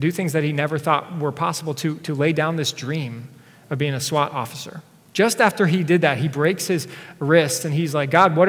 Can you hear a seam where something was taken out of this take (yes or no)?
no